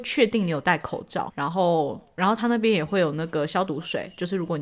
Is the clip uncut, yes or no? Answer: no